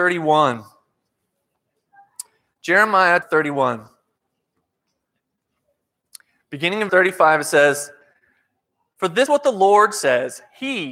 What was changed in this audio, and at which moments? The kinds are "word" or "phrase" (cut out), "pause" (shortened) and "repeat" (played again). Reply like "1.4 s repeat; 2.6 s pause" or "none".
3.2 s word; 6.9 s word; 9.3 s word